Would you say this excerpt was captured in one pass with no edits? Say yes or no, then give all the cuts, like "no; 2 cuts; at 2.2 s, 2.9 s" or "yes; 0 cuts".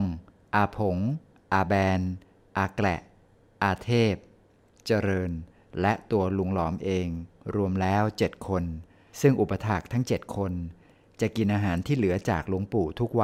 yes; 0 cuts